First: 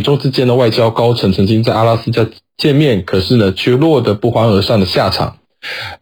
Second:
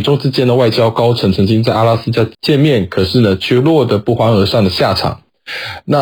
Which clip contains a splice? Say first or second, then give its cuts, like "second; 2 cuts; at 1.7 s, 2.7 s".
second; 1 cut; at 2.3 s